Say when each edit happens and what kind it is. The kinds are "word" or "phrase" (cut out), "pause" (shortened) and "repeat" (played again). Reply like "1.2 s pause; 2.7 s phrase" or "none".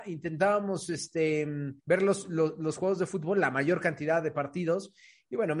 1.8 s pause